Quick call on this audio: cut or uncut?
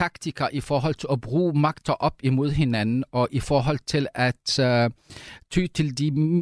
uncut